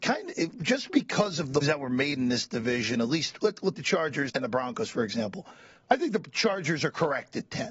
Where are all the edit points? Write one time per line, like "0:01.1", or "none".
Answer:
0:01.6
0:03.7
0:04.3